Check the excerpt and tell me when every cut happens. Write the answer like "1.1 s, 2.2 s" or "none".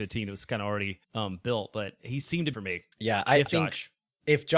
1.0 s, 2.2 s, 2.5 s, 2.9 s, 3.5 s

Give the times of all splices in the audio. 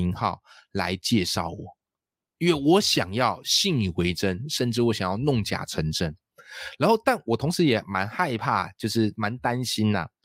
none

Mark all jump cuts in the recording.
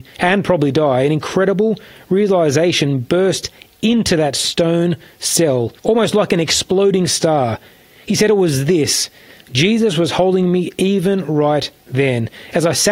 5.8 s

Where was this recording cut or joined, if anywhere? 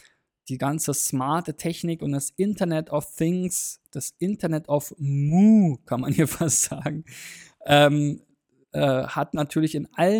none

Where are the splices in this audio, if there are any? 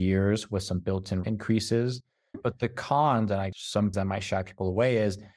1.2 s, 3.5 s, 3.9 s

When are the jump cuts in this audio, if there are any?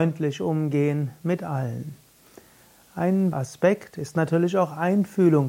3.3 s

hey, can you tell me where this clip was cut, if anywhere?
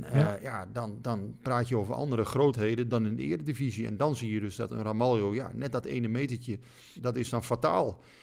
2.9 s

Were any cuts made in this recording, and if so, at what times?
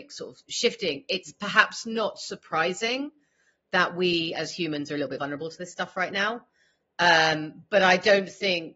5.2 s

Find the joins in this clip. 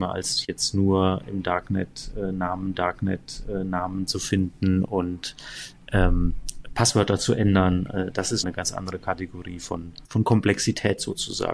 2.7 s, 8.4 s, 10.0 s

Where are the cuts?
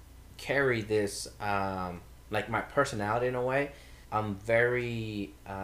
4.0 s

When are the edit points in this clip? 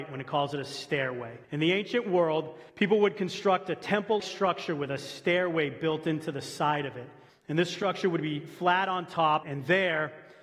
1.4 s, 2.7 s, 4.2 s, 7.3 s, 9.4 s

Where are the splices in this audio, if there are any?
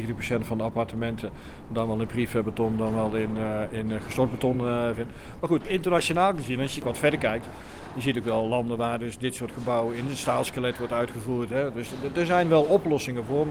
none

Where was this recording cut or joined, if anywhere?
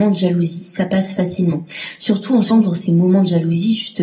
2.5 s

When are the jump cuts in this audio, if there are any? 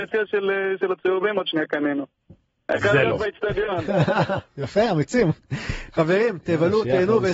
none

